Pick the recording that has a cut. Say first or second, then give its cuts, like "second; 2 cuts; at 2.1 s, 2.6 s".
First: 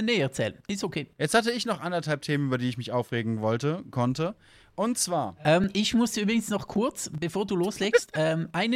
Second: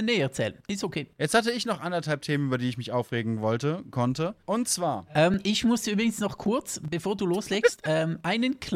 second; 1 cut; at 4.4 s